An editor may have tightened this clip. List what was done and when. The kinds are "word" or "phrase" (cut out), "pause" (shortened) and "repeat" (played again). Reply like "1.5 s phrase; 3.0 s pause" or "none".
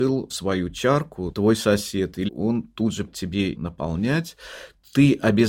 1.3 s word; 2.3 s word; 3.1 s word; 3.6 s word